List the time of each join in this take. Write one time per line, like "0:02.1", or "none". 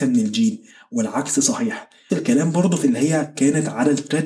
0:02.1
0:02.8